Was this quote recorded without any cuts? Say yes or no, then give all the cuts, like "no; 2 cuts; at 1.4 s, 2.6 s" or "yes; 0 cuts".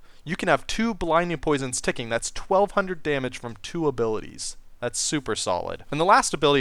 yes; 0 cuts